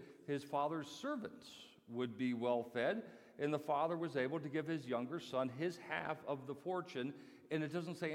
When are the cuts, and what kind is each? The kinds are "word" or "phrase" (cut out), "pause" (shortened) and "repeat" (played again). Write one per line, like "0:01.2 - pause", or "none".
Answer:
none

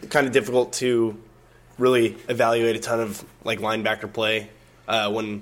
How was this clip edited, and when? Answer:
none

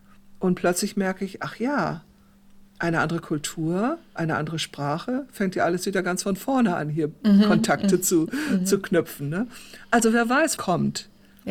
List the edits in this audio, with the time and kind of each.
0:10.6 - word

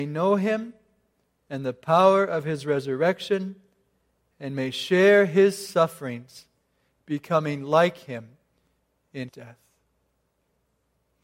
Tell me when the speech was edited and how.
0:09.3 - word

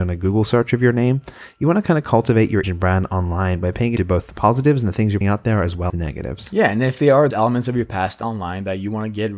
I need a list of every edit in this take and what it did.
0:02.6 - word
0:04.0 - word
0:05.2 - word
0:05.9 - word
0:07.3 - word

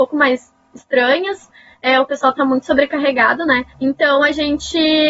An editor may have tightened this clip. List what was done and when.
0:03.7 - pause

